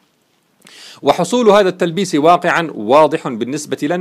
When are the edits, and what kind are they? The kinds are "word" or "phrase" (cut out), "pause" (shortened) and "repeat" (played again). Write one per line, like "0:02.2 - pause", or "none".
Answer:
none

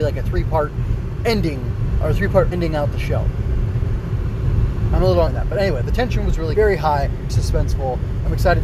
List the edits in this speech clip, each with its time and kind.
0:02.0 - word
0:02.5 - word
0:05.3 - word
0:06.5 - word
0:07.3 - word

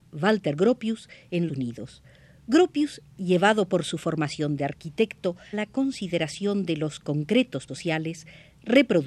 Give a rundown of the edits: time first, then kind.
0:01.5 - phrase
0:05.5 - word
0:07.7 - word

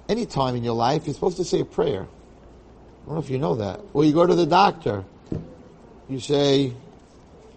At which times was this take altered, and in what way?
none

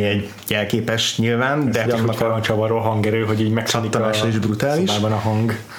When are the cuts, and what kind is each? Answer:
0:01.9 - word

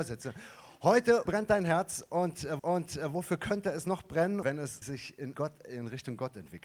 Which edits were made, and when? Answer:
0:01.3 - word
0:02.6 - repeat
0:04.4 - phrase
0:04.8 - word
0:05.3 - word

